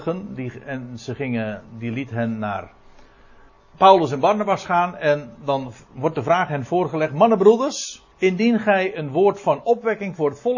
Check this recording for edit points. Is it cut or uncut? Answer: cut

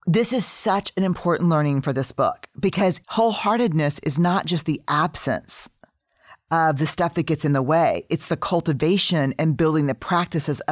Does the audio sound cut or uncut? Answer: uncut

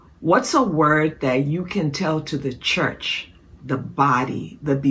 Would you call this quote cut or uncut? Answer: uncut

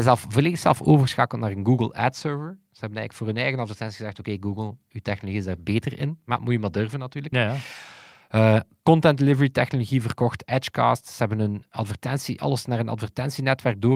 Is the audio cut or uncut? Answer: uncut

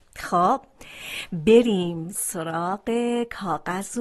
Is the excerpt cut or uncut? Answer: uncut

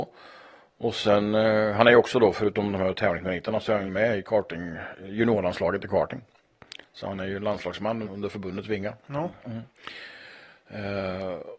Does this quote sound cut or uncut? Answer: cut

